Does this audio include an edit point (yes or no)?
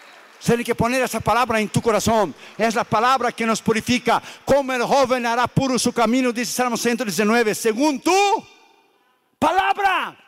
no